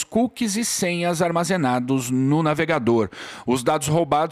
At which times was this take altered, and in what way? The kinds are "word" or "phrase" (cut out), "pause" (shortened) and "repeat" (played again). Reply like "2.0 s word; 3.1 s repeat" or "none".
none